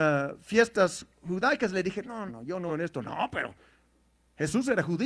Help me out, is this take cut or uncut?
cut